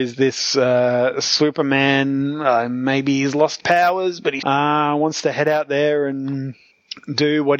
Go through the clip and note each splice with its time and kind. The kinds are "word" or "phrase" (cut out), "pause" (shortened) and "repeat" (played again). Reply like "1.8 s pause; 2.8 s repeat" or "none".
3.6 s word; 4.4 s word